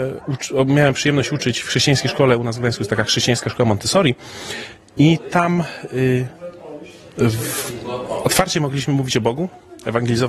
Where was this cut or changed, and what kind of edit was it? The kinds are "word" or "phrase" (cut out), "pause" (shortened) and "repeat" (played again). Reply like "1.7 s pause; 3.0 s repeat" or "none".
none